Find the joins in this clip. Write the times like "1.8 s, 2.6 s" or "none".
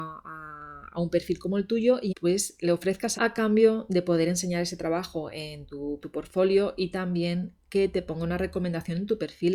2.1 s, 3.1 s, 6.0 s